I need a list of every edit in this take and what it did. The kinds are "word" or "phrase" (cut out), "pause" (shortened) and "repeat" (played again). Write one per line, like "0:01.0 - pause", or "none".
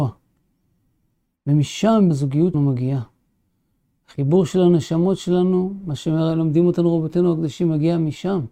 0:02.1 - word
0:02.5 - word